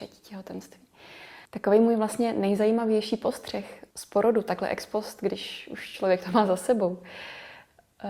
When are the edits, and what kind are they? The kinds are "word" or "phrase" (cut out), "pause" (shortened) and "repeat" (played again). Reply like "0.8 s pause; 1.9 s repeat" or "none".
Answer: 3.9 s pause